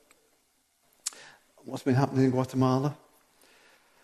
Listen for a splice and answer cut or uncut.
uncut